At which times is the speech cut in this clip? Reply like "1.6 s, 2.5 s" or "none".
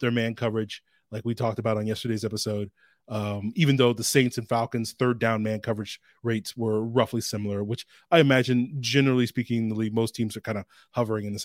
none